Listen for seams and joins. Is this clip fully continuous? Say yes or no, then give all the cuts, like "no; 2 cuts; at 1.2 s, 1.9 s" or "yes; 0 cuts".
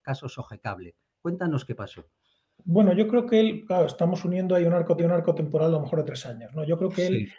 no; 1 cut; at 5.0 s